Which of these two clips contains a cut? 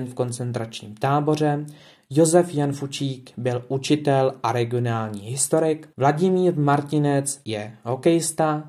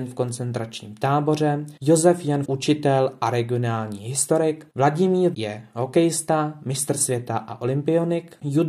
second; 3 cuts; at 1.8 s, 2.4 s, 5.3 s

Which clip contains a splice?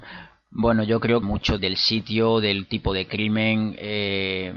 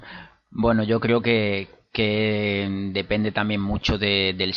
first; 2 cuts; at 1.2 s, 1.6 s

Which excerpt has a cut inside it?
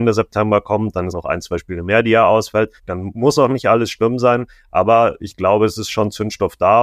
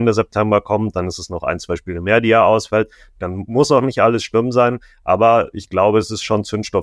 first; 2 cuts; at 1.1 s, 2.8 s

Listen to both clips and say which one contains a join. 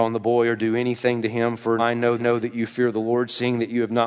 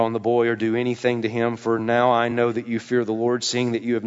first; 2 cuts; at 1.8 s, 2.2 s

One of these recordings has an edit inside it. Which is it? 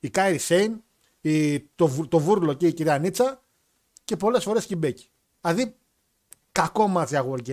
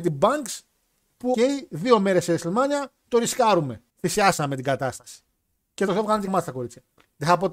second; 4 cuts; at 1.3 s, 3.9 s, 5.9 s, 6.3 s

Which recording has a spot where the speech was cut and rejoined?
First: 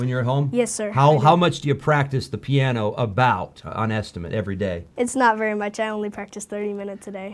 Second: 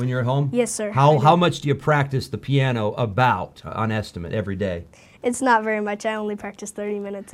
first; 1 cut; at 4.9 s

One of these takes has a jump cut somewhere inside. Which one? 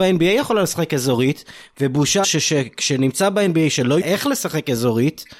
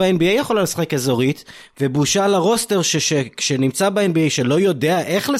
first; 2 cuts; at 2.2 s, 4.0 s

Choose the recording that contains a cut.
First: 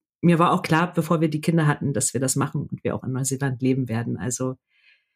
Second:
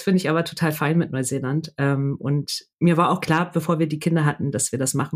second; 1 cut; at 2.7 s

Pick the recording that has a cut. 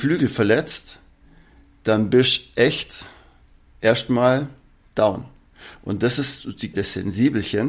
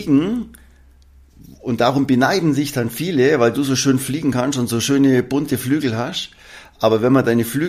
first; 1 cut; at 6.7 s

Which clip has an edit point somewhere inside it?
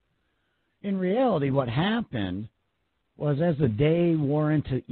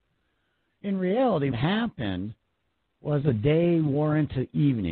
second; 2 cuts; at 1.5 s, 3.2 s

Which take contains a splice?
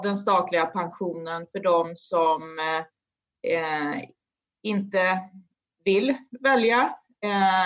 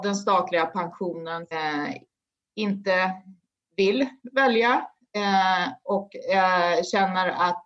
second; 1 cut; at 1.5 s

